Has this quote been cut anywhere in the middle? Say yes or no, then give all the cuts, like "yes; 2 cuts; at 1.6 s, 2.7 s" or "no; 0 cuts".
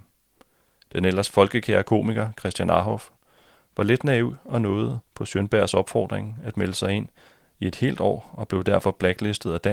yes; 1 cut; at 5.1 s